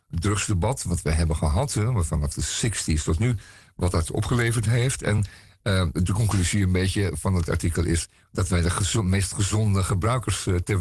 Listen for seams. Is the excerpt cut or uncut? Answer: uncut